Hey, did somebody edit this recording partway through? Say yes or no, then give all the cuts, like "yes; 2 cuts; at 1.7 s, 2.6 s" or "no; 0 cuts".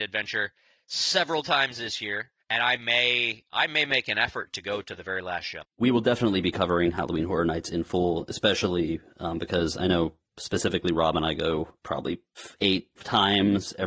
yes; 4 cuts; at 2.4 s, 5.7 s, 11.8 s, 12.9 s